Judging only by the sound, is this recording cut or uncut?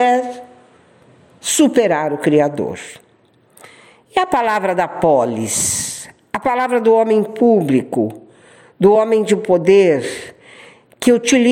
uncut